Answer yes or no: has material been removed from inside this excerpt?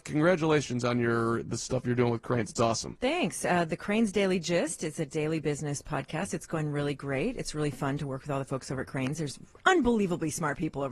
no